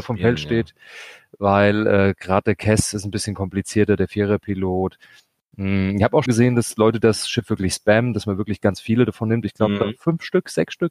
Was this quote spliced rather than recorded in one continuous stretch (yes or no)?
yes